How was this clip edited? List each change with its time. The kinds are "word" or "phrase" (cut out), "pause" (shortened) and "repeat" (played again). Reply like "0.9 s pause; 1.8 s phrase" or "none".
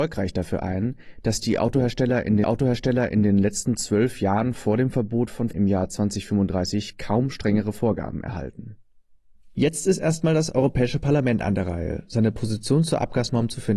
2.4 s repeat; 5.5 s word